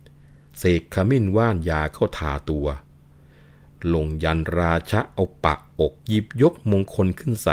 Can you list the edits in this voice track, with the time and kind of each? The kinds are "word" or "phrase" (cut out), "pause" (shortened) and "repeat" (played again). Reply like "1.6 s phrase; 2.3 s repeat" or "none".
6.0 s pause